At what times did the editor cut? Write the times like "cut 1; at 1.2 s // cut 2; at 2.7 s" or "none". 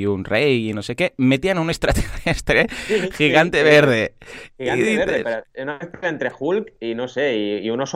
none